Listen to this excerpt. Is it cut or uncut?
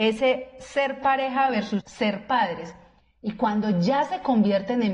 cut